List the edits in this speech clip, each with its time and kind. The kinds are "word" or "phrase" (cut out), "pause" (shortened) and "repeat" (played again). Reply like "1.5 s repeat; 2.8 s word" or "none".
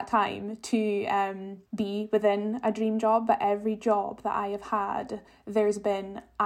1.7 s pause; 5.3 s pause